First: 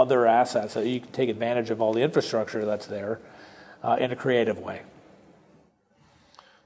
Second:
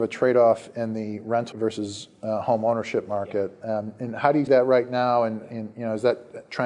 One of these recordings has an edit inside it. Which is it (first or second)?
second